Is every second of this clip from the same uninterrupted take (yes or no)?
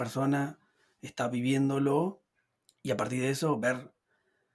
yes